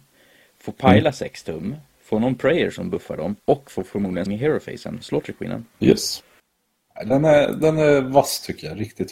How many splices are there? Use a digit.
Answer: 4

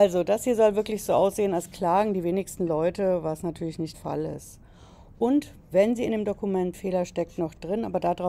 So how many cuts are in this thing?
2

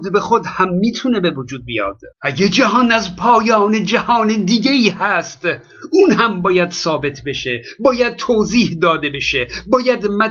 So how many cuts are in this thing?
1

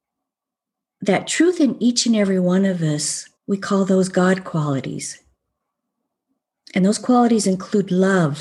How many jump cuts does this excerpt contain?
1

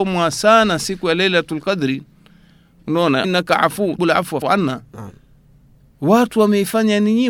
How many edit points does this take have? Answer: 3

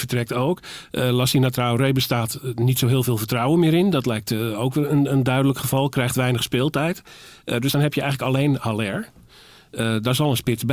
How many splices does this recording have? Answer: 0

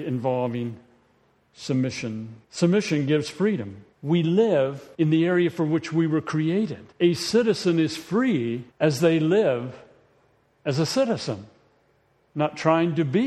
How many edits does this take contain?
5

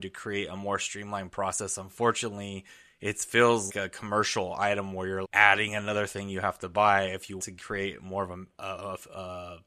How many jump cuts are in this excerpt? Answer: 3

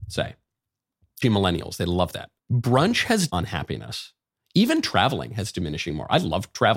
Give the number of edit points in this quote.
3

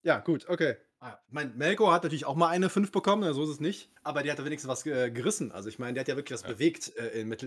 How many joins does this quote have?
1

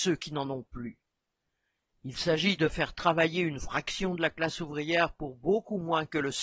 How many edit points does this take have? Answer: 1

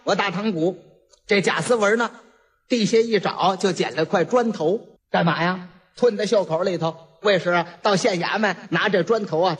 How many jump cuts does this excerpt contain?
1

